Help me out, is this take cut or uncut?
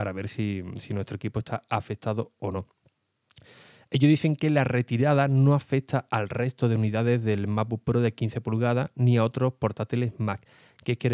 uncut